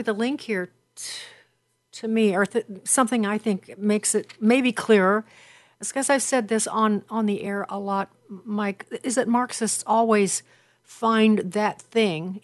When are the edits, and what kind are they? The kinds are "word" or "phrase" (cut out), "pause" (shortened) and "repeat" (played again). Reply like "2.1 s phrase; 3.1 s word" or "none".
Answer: none